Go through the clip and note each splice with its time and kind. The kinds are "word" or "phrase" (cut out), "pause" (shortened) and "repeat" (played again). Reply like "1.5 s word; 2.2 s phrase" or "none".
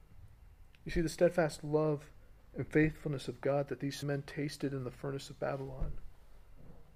4.0 s word